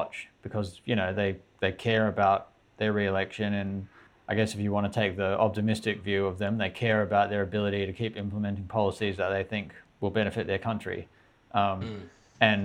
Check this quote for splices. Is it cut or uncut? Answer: uncut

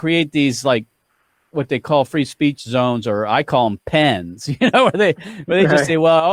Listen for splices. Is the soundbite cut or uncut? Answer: uncut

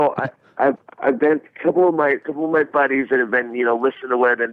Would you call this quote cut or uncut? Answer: uncut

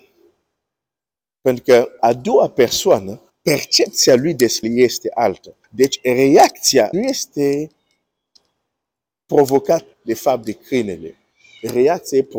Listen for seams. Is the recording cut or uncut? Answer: cut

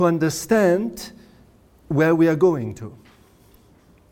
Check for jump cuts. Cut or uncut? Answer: uncut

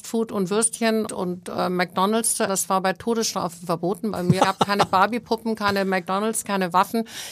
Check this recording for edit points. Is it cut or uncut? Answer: cut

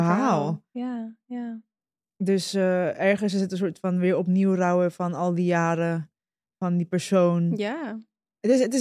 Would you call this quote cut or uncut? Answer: uncut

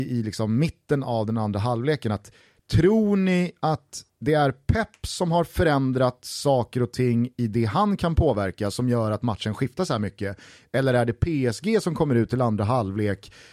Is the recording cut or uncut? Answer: uncut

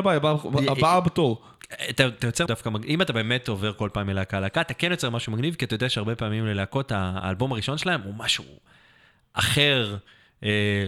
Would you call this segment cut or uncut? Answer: cut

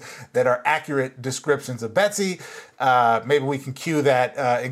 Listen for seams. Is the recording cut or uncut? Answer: uncut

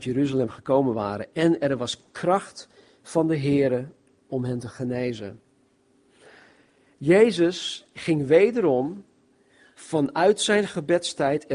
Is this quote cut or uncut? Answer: uncut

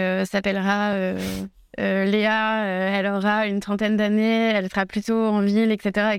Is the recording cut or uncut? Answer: uncut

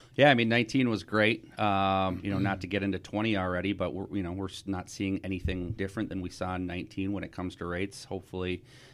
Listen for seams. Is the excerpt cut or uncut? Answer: cut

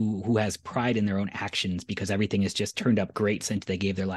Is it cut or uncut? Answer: uncut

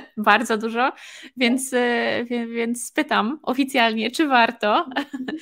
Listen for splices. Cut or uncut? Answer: uncut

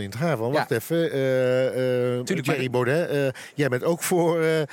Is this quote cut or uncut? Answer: uncut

